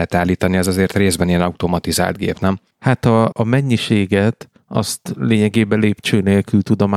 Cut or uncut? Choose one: cut